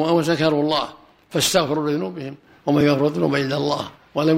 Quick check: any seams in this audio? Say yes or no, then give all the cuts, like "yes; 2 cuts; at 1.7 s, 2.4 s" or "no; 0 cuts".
no; 0 cuts